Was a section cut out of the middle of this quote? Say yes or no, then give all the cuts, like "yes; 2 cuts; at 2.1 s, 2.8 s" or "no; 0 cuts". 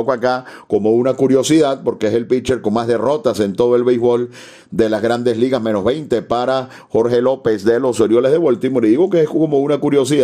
no; 0 cuts